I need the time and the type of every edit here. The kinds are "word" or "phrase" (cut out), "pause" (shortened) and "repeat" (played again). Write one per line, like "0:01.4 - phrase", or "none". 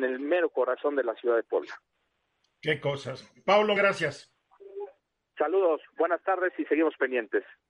0:03.8 - word